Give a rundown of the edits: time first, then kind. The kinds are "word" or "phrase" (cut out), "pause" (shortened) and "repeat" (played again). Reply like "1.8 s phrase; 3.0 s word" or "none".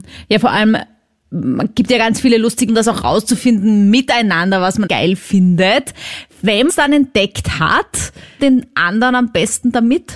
2.7 s word; 4.9 s word; 6.7 s word; 8.4 s phrase